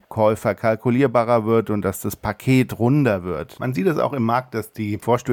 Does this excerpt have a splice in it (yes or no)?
no